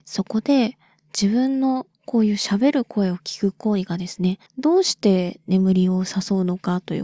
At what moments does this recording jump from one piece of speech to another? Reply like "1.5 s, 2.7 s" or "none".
1.9 s